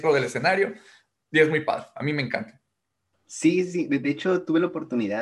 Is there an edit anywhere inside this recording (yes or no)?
no